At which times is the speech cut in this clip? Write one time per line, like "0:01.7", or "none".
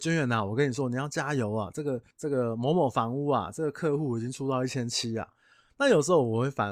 0:02.1